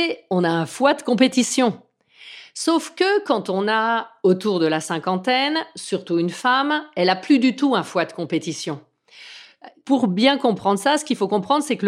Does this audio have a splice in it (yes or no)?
no